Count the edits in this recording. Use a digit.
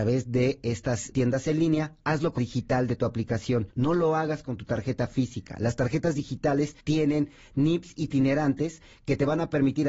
4